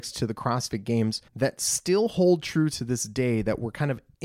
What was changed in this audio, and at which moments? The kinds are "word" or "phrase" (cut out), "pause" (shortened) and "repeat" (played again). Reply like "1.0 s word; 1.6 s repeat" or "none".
1.3 s pause